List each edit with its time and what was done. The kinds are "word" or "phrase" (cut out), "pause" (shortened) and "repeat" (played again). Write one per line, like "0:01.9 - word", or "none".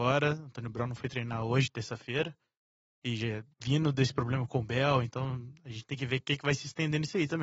0:03.5 - pause